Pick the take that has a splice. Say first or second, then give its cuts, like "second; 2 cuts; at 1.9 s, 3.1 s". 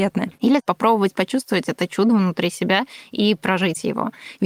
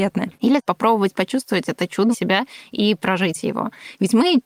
second; 1 cut; at 2.1 s